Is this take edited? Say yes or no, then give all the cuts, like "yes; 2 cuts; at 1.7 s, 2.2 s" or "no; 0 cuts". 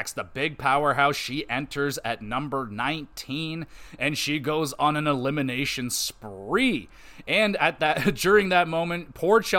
no; 0 cuts